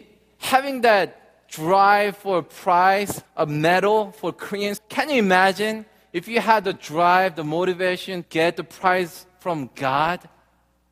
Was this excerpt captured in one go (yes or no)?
no